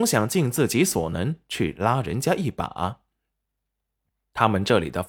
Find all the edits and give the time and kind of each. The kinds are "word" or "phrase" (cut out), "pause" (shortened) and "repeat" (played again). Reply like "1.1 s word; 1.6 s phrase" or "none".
none